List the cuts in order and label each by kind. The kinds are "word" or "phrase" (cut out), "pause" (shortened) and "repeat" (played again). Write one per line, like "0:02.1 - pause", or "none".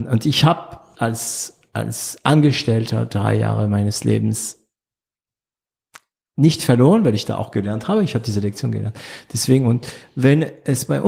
0:01.0 - word